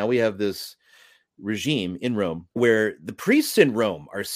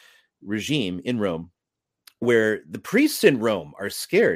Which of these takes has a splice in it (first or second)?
first